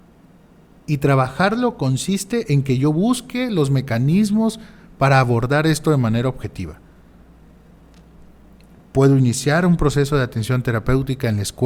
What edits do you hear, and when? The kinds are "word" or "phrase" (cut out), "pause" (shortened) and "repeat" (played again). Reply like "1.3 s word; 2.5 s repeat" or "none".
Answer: none